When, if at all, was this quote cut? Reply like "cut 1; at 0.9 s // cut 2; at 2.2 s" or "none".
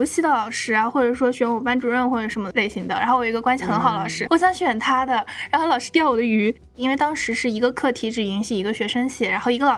cut 1; at 4.3 s